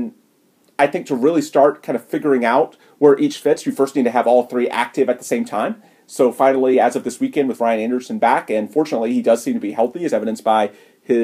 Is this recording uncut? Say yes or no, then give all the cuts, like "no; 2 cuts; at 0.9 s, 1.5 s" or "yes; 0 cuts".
yes; 0 cuts